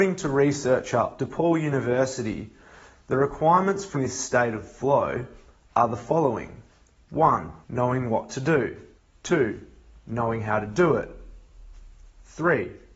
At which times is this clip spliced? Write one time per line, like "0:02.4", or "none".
0:01.2
0:03.9
0:07.6
0:09.0